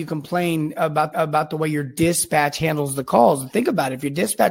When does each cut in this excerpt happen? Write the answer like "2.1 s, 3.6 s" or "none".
1.1 s